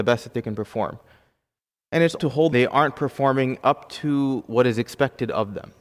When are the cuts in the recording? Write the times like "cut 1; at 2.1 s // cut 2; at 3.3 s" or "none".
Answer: cut 1; at 2.2 s // cut 2; at 2.5 s